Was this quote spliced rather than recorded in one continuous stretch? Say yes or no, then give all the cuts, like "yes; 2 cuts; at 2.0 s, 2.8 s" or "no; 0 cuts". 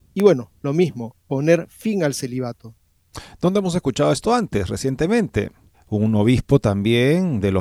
yes; 1 cut; at 5.7 s